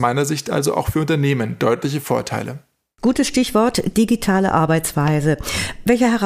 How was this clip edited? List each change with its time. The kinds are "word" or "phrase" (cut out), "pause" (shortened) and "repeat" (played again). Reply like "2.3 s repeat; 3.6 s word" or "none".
none